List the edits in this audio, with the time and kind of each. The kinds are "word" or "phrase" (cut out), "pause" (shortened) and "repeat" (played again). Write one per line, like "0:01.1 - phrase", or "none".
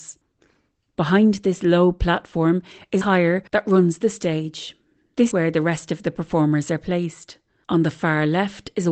0:03.0 - phrase
0:03.5 - pause
0:04.0 - phrase
0:05.3 - word

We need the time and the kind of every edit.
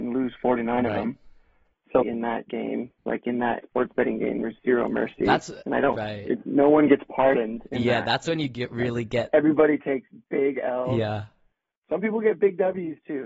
0:02.0 - phrase
0:03.0 - pause
0:03.6 - phrase

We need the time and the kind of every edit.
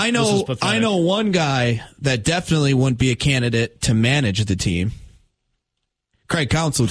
none

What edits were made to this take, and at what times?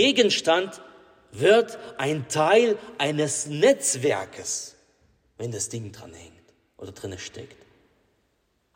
none

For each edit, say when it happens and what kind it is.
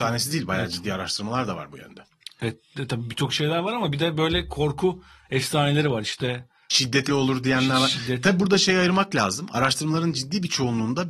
0:07.1 - word

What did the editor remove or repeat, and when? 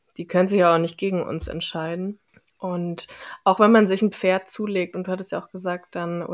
0:02.3 - pause

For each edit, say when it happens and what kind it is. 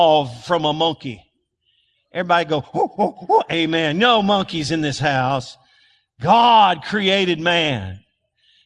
none

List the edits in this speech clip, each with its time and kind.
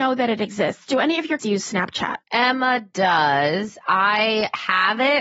0:01.4 - word
0:02.2 - pause

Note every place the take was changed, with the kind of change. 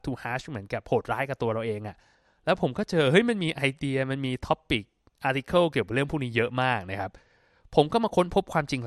none

